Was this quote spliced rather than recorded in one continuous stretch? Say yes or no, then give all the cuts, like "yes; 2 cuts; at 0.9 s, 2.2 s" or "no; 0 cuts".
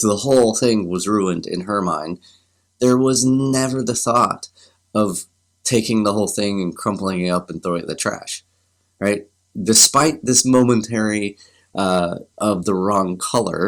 yes; 1 cut; at 12.3 s